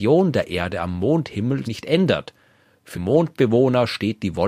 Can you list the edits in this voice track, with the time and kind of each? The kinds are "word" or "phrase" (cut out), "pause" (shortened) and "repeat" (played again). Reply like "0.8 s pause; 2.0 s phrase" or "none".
1.6 s word; 2.9 s word